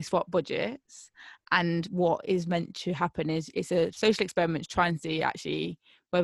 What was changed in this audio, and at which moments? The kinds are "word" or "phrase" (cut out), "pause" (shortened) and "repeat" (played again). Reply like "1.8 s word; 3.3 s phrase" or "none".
none